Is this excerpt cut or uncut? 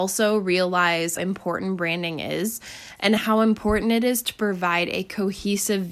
cut